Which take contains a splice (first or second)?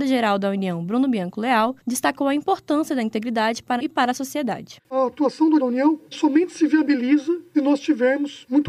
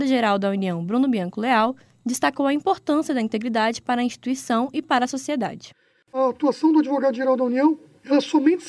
first